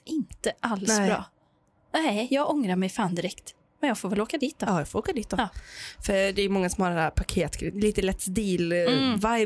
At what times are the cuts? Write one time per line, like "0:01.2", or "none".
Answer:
none